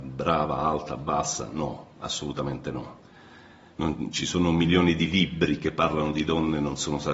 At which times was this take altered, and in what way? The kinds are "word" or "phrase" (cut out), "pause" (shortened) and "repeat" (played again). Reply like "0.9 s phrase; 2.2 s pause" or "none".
none